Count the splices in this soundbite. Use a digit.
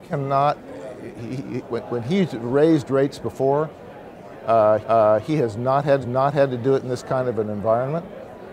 2